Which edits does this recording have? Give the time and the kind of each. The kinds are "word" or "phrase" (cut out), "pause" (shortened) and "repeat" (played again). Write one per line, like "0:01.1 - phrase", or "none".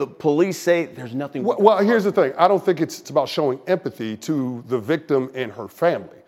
0:03.0 - phrase